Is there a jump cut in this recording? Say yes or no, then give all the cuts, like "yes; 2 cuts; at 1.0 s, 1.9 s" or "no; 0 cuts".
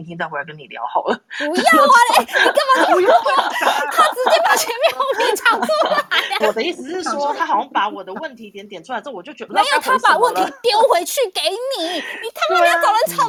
yes; 3 cuts; at 3.9 s, 6.4 s, 9.5 s